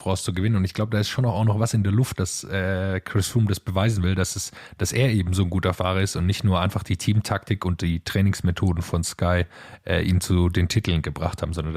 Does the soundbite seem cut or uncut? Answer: uncut